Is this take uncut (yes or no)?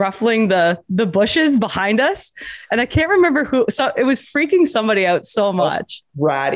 yes